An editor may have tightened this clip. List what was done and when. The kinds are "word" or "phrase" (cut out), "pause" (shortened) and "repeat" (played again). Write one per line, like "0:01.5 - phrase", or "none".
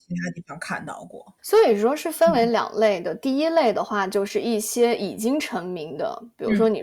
0:01.4 - pause

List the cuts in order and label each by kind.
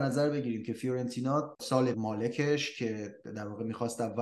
0:01.6 - word
0:01.9 - phrase

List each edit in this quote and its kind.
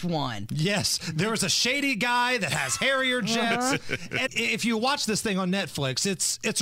0:04.3 - word

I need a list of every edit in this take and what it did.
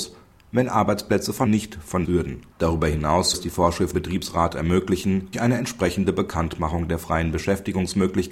0:01.5 - word
0:02.0 - phrase
0:02.5 - pause
0:03.3 - word
0:03.9 - word
0:05.3 - word

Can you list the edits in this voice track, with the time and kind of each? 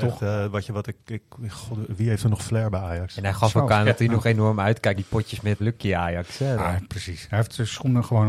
0:05.0 - word
0:05.6 - word
0:06.6 - word

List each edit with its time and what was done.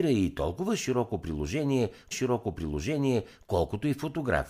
0:02.1 - repeat

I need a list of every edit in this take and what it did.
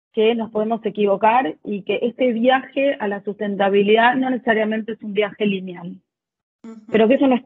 none

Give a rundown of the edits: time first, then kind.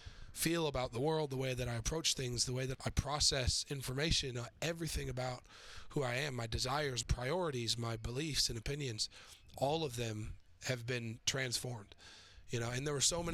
0:02.7 - word
0:04.3 - word
0:07.0 - word

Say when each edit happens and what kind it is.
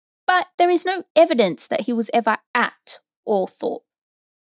none

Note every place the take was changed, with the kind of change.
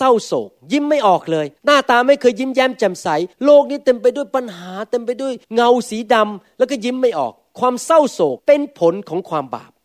0:01.6 - pause
0:03.3 - pause
0:05.4 - pause
0:08.4 - pause

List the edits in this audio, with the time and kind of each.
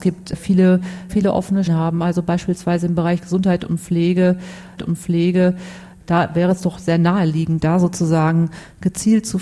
0:01.1 - phrase
0:01.7 - word
0:04.8 - repeat

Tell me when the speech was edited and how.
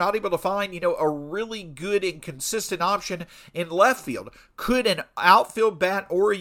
none

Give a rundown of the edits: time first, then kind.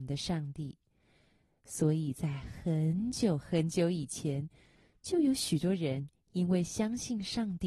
none

